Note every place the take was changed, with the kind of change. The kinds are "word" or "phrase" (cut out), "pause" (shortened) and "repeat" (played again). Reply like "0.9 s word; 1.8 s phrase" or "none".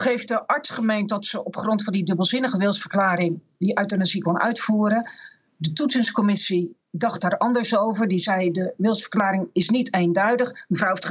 6.8 s pause